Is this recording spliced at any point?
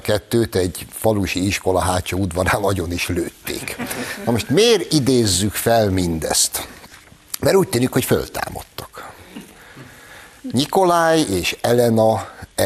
no; 0 cuts

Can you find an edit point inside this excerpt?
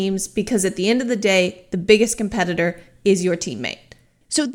no; 0 cuts

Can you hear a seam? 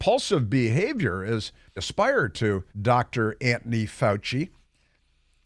yes; 2 cuts; at 1.8 s, 2.7 s

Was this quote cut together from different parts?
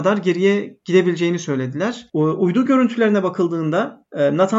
no; 0 cuts

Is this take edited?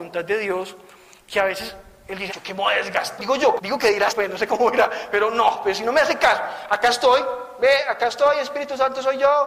yes; 4 cuts; at 2.3 s, 3.2 s, 3.6 s, 4.1 s

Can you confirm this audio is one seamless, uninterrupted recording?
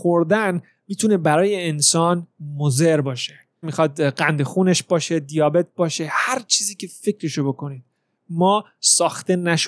no; 1 cut; at 3.6 s

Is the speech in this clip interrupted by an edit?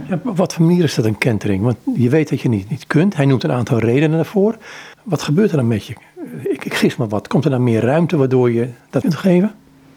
yes; 2 cuts; at 4.9 s, 9.0 s

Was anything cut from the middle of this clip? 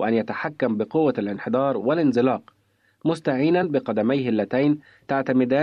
no; 0 cuts

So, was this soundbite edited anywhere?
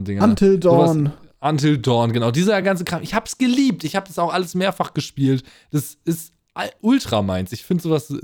no; 0 cuts

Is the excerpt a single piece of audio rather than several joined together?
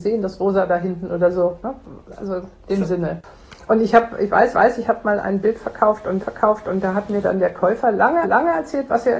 no; 4 cuts; at 2.6 s, 4.5 s, 6.2 s, 8.2 s

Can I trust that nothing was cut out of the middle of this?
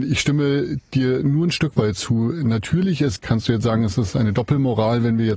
no; 1 cut; at 3.2 s

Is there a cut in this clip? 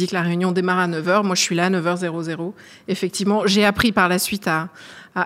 no; 0 cuts

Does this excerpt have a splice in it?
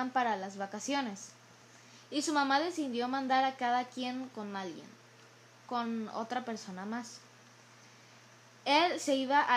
no; 0 cuts

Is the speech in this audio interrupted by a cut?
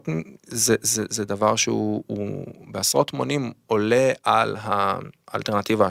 no; 0 cuts

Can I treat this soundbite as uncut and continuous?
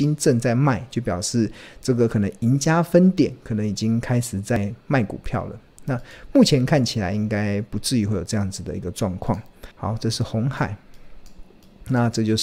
no; 1 cut; at 9.7 s

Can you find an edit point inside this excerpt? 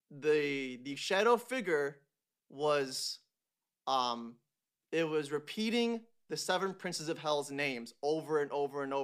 no; 0 cuts

